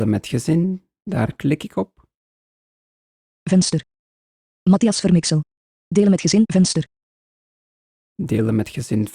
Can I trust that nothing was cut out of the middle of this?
yes; 0 cuts

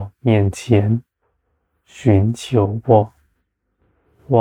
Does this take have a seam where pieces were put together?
no; 0 cuts

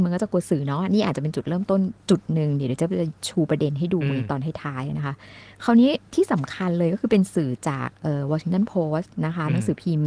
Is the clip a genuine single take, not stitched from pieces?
no; 2 cuts; at 3.2 s, 6.1 s

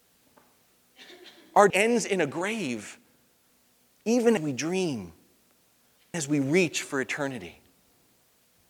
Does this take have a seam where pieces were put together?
yes; 3 cuts; at 1.7 s, 4.4 s, 6.1 s

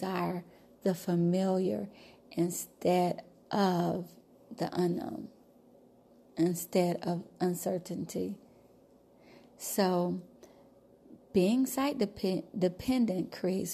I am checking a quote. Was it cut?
no; 0 cuts

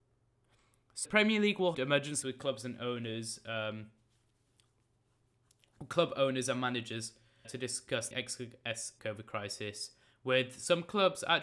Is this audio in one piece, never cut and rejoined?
no; 6 cuts; at 1.0 s, 1.7 s, 2.2 s, 7.4 s, 8.1 s, 9.0 s

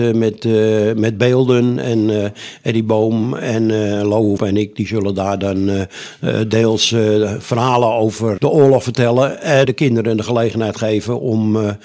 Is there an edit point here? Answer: yes; 3 cuts; at 4.4 s, 8.4 s, 9.6 s

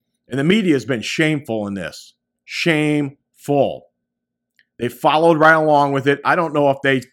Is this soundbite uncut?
yes; 0 cuts

